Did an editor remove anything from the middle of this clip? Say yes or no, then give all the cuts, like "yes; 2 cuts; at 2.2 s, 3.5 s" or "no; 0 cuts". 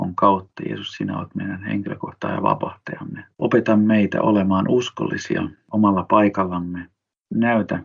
yes; 1 cut; at 3.3 s